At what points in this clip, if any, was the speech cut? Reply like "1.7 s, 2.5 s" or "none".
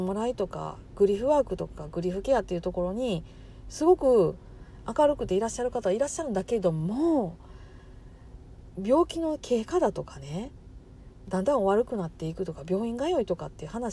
8.7 s